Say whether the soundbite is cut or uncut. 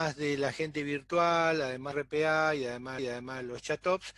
cut